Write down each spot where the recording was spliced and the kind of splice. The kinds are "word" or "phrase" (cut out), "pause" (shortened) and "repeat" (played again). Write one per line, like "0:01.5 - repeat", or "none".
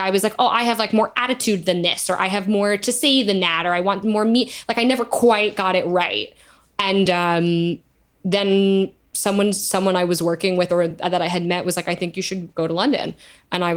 none